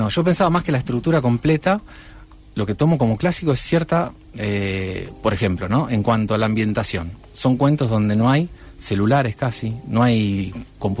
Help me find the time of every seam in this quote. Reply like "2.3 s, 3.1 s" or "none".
none